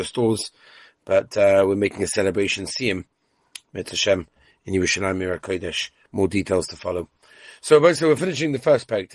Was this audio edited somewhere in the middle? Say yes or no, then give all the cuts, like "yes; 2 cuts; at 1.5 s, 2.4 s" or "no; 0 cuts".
no; 0 cuts